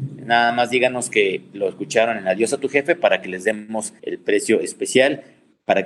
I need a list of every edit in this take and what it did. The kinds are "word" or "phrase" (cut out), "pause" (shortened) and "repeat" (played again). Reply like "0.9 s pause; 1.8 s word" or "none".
4.0 s pause